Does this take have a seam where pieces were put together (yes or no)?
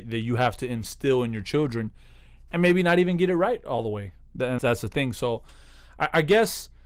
yes